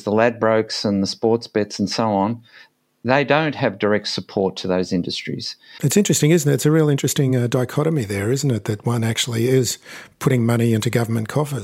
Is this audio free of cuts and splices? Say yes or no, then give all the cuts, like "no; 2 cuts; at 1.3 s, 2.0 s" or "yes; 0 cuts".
yes; 0 cuts